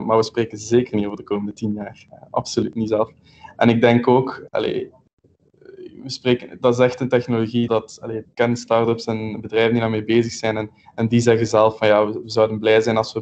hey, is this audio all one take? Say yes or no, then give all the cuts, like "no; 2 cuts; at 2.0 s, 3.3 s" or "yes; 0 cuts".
no; 3 cuts; at 4.5 s, 7.7 s, 8.2 s